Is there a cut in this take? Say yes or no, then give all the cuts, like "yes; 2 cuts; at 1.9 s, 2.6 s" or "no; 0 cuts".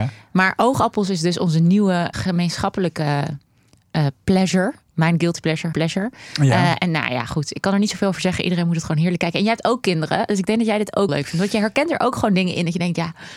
yes; 3 cuts; at 2.1 s, 5.7 s, 11.1 s